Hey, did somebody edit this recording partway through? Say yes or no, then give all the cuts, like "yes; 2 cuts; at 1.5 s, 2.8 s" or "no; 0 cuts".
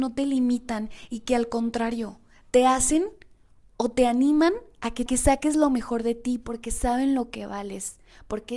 yes; 2 cuts; at 3.7 s, 5.1 s